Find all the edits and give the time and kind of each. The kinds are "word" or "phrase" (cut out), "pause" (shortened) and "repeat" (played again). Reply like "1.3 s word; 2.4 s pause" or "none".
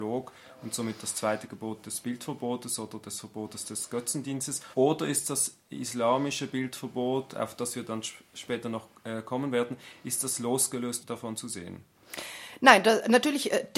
4.7 s pause; 11.0 s word